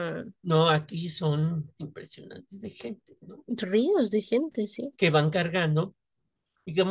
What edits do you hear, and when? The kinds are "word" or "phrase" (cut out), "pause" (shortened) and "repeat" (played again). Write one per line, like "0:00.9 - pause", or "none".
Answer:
0:01.8 - word
0:04.9 - pause